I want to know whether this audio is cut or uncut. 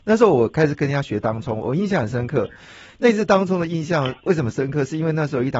uncut